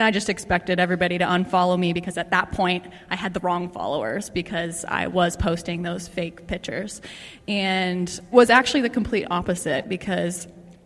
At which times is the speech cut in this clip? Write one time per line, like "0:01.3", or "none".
0:08.3